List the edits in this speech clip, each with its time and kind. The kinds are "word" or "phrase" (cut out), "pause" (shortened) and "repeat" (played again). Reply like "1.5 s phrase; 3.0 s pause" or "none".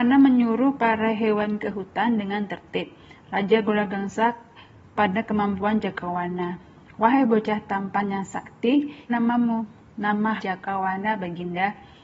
1.6 s word; 5.0 s word; 9.1 s word; 10.4 s word